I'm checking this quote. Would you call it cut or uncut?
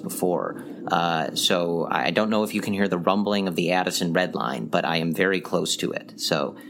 uncut